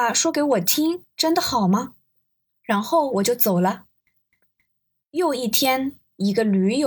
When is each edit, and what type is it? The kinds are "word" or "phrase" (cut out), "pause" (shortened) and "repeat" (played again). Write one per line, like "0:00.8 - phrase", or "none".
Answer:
none